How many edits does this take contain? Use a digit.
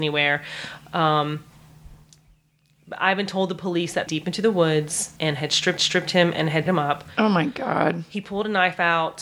4